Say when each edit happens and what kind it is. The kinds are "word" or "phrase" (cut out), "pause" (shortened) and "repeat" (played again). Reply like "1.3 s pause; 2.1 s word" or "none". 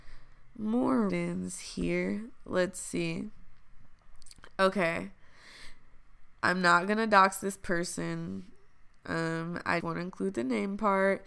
1.1 s word; 6.4 s pause; 9.8 s word